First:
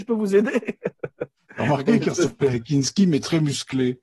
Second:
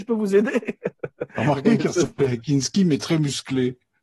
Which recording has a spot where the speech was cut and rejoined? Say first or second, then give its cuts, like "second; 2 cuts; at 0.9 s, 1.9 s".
second; 1 cut; at 1.3 s